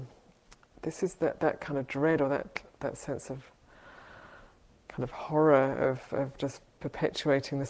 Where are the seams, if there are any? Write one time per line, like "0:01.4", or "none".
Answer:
none